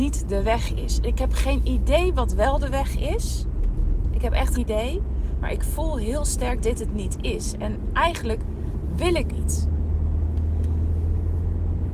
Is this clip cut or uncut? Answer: cut